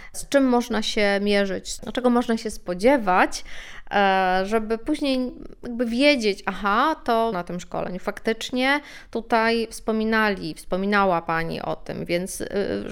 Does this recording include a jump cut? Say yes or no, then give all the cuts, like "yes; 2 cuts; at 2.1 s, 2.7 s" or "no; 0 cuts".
yes; 1 cut; at 7.3 s